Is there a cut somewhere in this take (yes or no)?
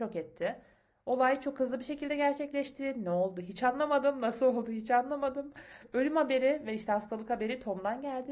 no